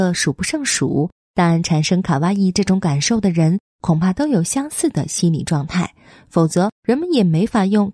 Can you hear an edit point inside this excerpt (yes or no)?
no